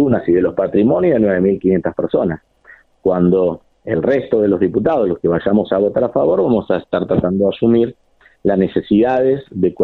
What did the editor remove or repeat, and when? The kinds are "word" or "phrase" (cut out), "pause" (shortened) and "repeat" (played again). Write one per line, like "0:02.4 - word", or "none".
none